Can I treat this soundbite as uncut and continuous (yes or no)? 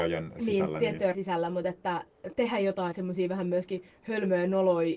no